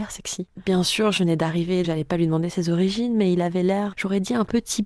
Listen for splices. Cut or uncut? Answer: cut